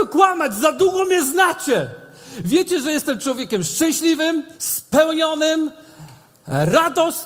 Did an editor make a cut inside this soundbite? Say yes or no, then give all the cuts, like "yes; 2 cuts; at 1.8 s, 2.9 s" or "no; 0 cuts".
yes; 1 cut; at 4.5 s